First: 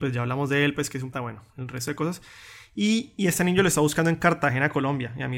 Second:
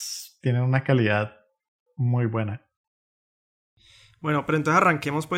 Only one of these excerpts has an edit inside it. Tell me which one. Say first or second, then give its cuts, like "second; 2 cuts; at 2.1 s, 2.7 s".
first; 1 cut; at 1.1 s